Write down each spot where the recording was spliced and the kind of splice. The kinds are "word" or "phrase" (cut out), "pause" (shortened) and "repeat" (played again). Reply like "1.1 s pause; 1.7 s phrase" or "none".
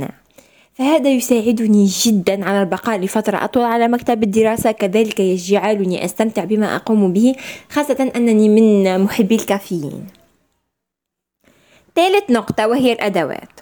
none